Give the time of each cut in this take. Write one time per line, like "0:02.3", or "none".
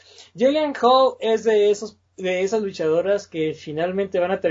none

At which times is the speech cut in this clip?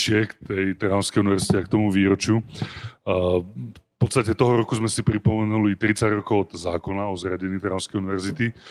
none

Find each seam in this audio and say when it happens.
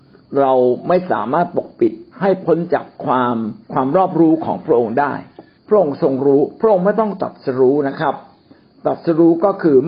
0:02.1
0:03.6
0:05.6

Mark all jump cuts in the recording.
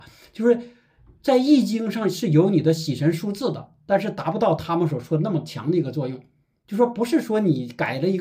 none

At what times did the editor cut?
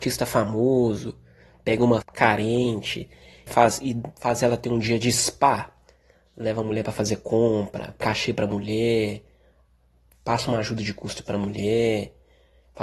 0:02.0
0:03.5
0:04.1
0:08.0

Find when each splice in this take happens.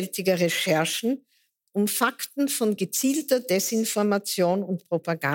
none

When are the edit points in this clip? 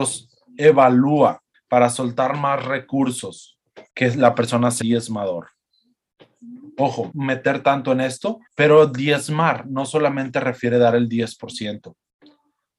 0:01.5
0:03.9
0:04.8
0:07.1
0:08.5

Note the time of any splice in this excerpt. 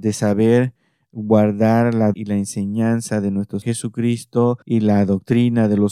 0:02.1
0:03.6
0:04.6

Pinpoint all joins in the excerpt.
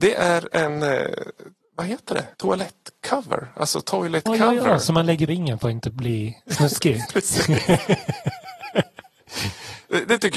0:01.6
0:02.3
0:04.3
0:05.3
0:06.4
0:07.1

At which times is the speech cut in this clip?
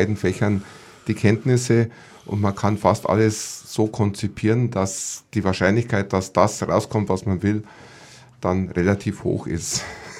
none

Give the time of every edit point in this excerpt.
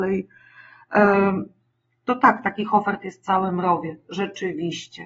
none

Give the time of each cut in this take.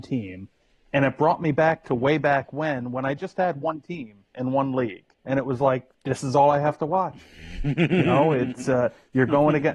0:05.1
0:05.9

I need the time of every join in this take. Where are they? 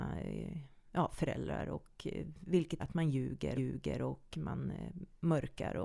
0:02.8
0:03.6

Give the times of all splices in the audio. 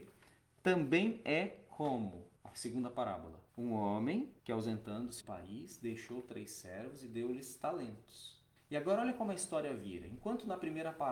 0:02.4
0:03.5
0:04.4
0:05.2
0:08.6

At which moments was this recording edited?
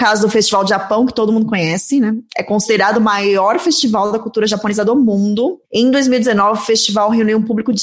none

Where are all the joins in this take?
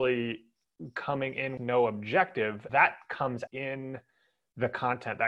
0:01.6
0:02.7
0:03.5

